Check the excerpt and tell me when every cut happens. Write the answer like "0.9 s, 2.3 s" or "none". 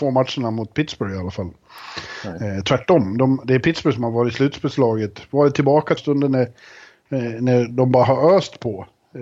6.0 s